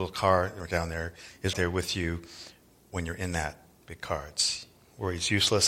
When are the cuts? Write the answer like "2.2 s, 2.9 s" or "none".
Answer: 1.5 s